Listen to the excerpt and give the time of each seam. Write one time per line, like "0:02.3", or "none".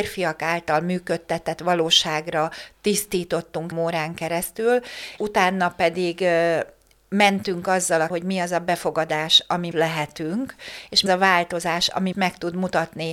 0:03.7
0:05.2
0:08.1
0:09.7
0:11.1
0:12.1